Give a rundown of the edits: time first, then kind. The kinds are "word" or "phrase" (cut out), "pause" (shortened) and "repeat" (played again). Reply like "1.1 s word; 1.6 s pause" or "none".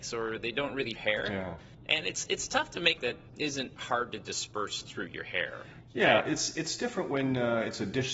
0.9 s phrase; 3.0 s phrase